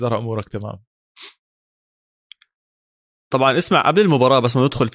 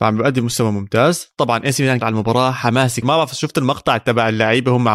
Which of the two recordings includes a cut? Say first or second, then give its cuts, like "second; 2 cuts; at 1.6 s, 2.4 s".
second; 2 cuts; at 2.0 s, 3.0 s